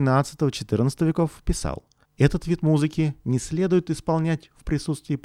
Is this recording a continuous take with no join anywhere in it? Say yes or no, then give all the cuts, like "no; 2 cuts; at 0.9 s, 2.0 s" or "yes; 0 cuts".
no; 1 cut; at 2.1 s